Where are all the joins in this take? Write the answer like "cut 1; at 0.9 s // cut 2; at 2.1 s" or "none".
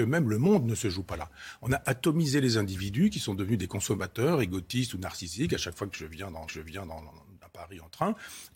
cut 1; at 6.5 s